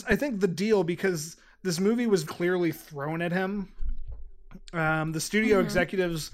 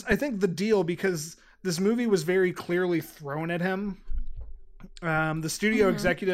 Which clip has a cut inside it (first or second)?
first